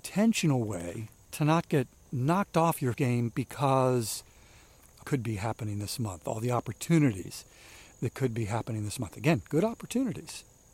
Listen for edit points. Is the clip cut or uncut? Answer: cut